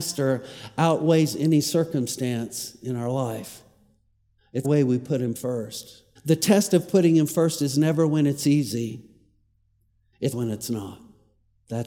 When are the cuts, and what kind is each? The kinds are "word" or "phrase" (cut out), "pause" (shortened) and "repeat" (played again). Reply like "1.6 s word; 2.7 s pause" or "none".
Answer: 4.6 s word; 6.2 s pause; 10.3 s word